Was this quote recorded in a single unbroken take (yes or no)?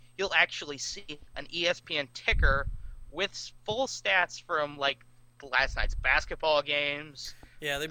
yes